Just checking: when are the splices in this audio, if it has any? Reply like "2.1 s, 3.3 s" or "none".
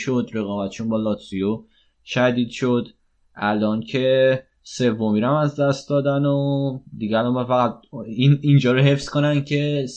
none